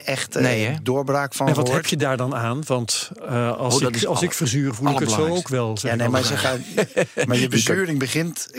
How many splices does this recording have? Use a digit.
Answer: 0